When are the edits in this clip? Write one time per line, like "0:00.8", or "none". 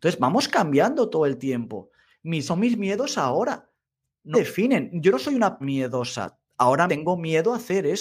0:02.5
0:04.3
0:05.6
0:06.9